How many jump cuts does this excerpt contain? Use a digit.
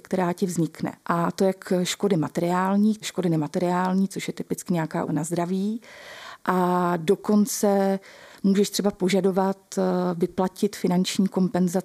3